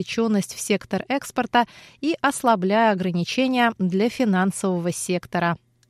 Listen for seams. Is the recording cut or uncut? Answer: uncut